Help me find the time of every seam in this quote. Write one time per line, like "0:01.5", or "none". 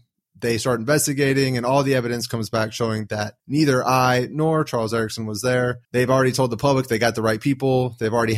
0:03.4
0:05.8